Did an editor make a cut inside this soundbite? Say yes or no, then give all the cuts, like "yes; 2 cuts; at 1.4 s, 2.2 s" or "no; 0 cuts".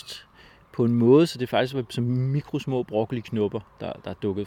no; 0 cuts